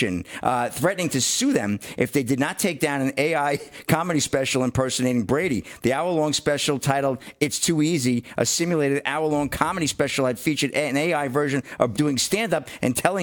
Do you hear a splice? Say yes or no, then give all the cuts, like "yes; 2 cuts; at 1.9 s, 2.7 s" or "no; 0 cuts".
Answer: yes; 1 cut; at 11.9 s